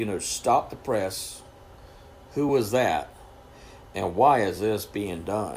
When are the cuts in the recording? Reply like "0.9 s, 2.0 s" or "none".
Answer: none